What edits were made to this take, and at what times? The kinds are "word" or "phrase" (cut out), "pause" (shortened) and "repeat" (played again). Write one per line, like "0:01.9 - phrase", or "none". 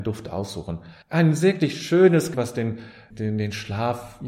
0:01.0 - pause
0:02.3 - phrase
0:03.1 - word